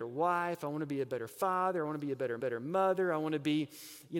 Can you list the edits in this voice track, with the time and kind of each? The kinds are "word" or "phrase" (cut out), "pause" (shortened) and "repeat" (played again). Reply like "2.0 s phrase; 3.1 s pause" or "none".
2.4 s repeat